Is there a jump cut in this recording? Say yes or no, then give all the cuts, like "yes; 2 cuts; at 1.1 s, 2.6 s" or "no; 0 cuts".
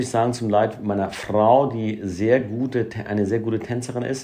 no; 0 cuts